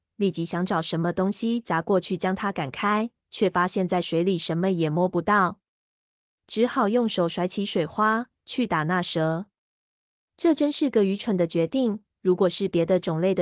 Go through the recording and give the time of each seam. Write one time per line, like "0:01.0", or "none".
none